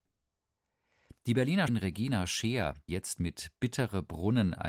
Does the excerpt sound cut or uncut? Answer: cut